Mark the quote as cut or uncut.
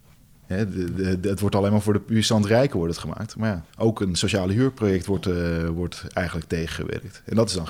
cut